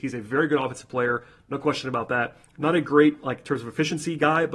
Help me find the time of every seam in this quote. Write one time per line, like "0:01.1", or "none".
none